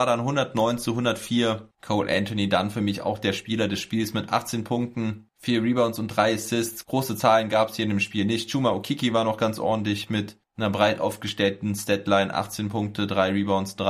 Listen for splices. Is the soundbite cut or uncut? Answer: uncut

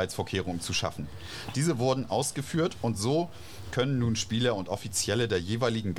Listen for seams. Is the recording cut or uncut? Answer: uncut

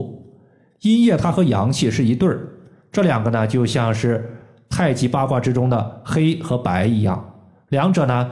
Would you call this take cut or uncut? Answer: uncut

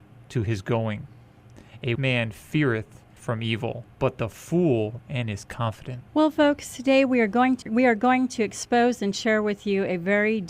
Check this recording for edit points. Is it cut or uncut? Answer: cut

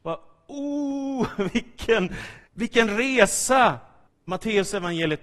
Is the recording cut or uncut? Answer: cut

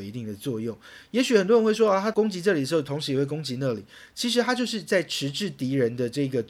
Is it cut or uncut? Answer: uncut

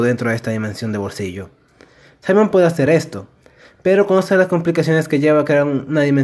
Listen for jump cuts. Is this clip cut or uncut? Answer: uncut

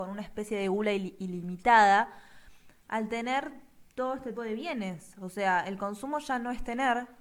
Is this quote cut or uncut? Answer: cut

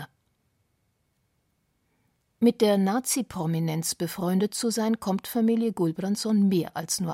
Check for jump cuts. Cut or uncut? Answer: uncut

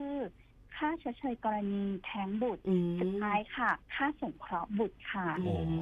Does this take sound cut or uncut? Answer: cut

